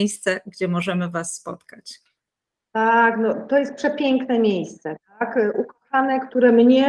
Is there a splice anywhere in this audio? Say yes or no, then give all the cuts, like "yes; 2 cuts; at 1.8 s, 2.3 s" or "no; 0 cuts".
no; 0 cuts